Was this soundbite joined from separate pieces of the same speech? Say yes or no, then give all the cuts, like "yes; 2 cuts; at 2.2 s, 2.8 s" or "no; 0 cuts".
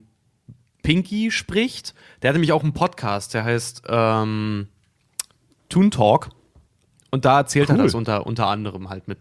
no; 0 cuts